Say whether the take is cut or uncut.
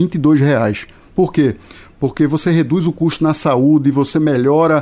uncut